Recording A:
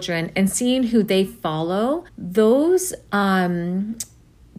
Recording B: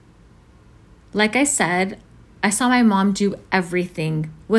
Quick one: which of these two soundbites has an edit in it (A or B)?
A